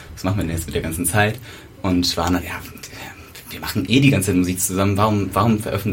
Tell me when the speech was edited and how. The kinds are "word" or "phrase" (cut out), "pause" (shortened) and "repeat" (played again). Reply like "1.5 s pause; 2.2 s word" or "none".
2.4 s word